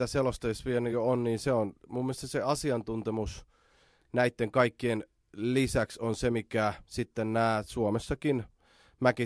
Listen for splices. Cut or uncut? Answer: uncut